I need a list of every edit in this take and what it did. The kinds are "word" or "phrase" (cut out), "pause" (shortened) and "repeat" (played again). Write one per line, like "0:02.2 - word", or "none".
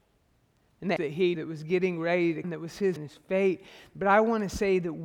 0:01.0 - word
0:01.3 - word
0:02.4 - word
0:03.0 - word